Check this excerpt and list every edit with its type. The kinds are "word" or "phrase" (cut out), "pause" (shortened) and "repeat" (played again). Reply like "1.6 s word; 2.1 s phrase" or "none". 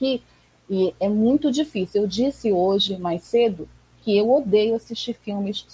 none